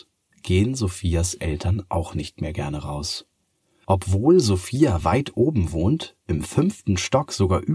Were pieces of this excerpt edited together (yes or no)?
no